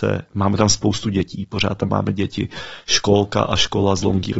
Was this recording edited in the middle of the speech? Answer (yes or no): no